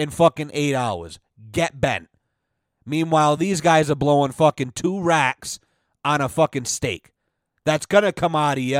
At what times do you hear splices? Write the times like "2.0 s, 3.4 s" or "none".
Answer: none